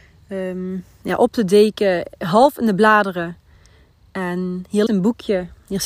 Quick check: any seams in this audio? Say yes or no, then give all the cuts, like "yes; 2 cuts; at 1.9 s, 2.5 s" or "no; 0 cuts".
yes; 1 cut; at 4.9 s